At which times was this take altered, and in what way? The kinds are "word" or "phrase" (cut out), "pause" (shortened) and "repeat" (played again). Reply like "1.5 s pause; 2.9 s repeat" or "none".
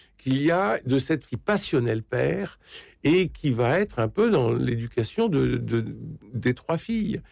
1.2 s word